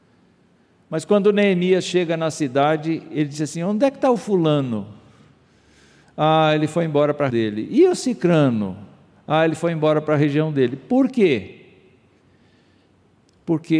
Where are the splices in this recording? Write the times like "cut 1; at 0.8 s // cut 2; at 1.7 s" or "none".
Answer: cut 1; at 7.3 s